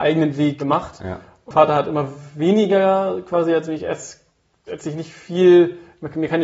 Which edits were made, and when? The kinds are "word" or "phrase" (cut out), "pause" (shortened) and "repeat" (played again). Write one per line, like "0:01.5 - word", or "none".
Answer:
0:01.5 - word